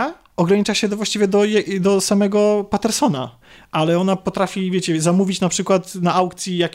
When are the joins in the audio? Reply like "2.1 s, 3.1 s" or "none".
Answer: none